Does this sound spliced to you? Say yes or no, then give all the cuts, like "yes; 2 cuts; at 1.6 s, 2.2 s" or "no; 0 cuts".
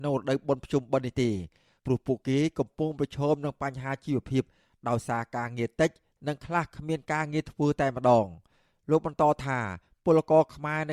no; 0 cuts